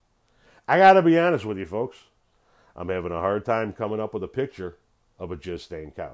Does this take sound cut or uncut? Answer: uncut